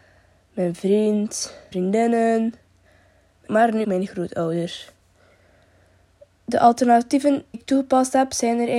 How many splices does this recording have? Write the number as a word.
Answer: four